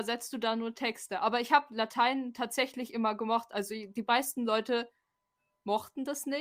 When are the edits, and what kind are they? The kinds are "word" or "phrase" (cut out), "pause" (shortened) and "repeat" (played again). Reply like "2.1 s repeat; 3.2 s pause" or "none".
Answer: none